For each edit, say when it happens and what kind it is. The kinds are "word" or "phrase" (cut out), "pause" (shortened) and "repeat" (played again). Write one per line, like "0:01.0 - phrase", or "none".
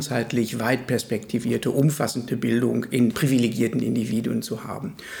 0:02.3 - word
0:03.1 - word